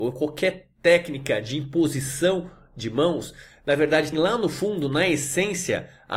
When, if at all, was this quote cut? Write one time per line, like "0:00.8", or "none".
0:04.1